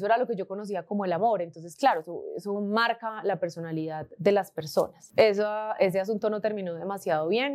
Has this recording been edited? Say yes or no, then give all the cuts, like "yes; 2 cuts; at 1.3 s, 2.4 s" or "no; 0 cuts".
no; 0 cuts